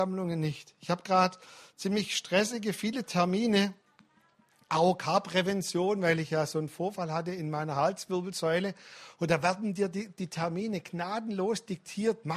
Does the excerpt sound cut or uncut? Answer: uncut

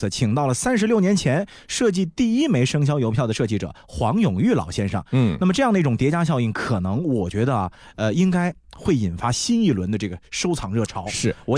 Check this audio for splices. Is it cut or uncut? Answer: uncut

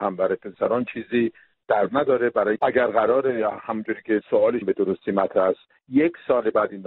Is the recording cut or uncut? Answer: cut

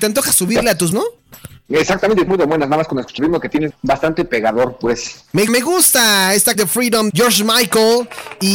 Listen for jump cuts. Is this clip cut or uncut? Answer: cut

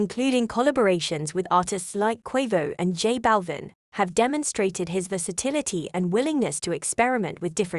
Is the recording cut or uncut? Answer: uncut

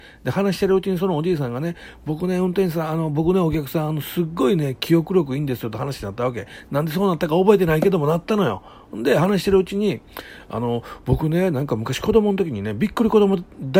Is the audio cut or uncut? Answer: uncut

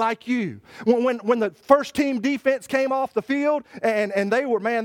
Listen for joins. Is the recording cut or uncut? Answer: uncut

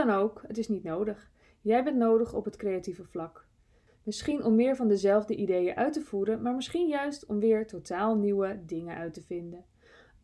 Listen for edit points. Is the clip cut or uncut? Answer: uncut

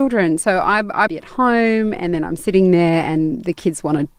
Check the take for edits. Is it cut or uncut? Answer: cut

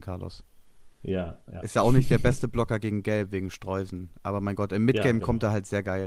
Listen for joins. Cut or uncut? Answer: uncut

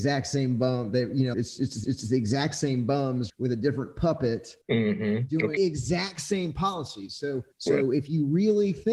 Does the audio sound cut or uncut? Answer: cut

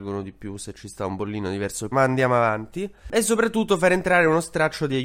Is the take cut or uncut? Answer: cut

